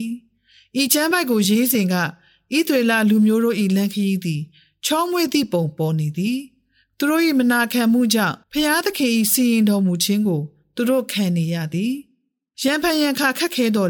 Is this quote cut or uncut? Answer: cut